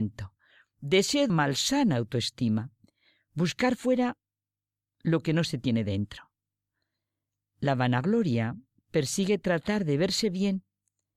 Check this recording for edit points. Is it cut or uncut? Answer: cut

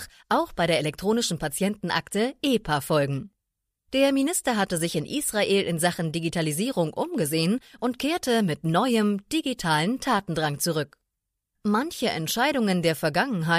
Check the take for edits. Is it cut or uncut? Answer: uncut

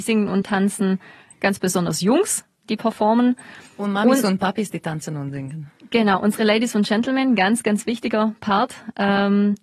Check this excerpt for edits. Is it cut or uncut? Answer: uncut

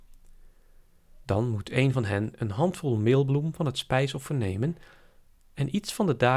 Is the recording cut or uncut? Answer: uncut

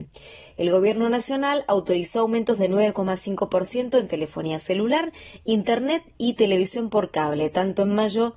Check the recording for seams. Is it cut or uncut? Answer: uncut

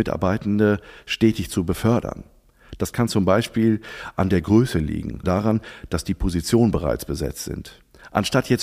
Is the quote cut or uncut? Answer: cut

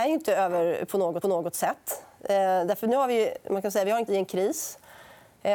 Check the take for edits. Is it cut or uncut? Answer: cut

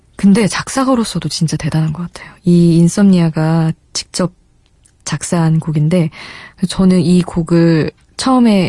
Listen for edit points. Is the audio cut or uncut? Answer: uncut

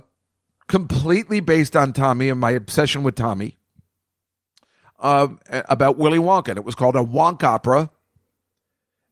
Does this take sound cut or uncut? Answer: uncut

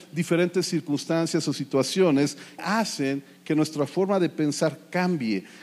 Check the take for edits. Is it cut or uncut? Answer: cut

